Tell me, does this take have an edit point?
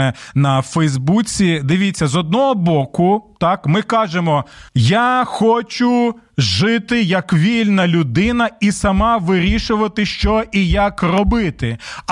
yes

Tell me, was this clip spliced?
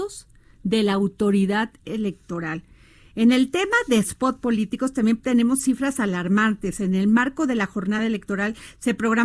no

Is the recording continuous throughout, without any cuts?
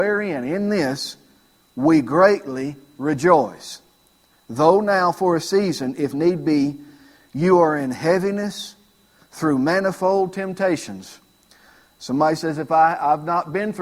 yes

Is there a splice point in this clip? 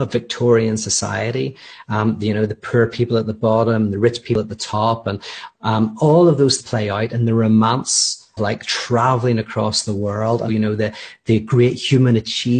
yes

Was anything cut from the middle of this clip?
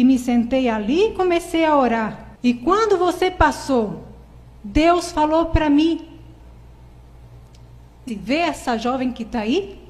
yes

